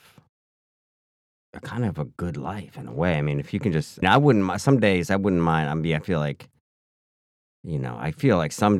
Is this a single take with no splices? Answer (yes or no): no